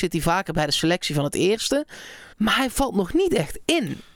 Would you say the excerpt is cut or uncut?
cut